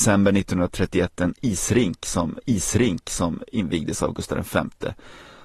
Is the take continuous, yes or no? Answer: no